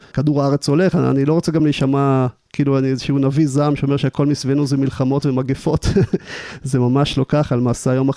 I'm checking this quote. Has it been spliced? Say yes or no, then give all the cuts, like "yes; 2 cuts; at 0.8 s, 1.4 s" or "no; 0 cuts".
no; 0 cuts